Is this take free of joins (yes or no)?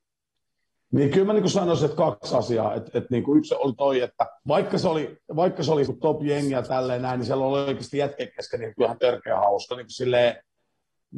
no